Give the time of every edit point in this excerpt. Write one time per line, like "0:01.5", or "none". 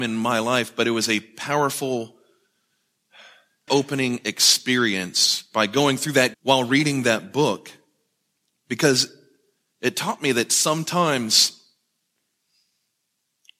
0:03.7
0:06.3